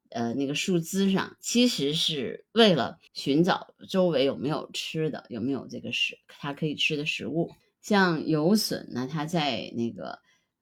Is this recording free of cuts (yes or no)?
no